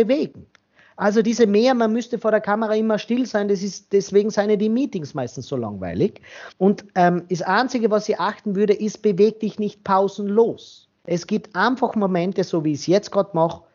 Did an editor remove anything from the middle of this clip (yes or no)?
yes